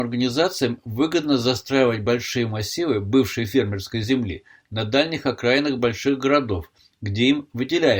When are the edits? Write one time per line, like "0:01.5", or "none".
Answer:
none

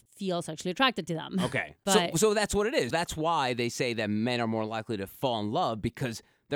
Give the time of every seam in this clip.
0:02.9

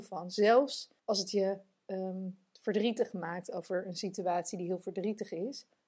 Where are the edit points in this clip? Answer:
0:01.0

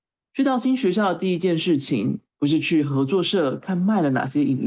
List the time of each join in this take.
0:02.3

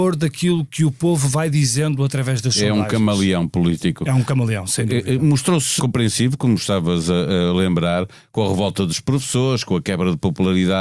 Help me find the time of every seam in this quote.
0:05.8

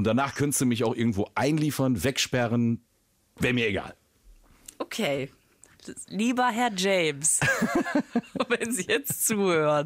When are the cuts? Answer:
none

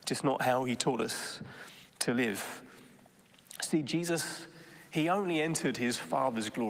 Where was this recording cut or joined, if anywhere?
none

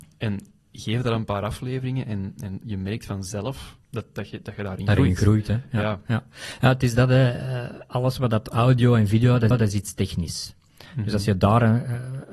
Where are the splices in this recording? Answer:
0:03.8
0:09.5

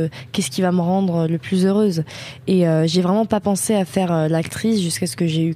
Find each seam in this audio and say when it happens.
none

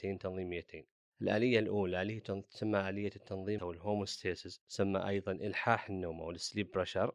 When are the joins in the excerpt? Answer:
0:03.6

